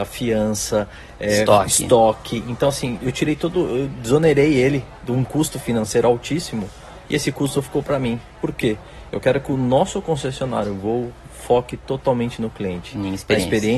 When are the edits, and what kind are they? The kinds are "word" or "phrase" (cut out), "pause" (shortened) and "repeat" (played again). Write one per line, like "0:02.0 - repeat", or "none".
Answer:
0:03.0 - word